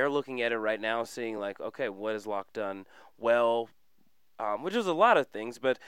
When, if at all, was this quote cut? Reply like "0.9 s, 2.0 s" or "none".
none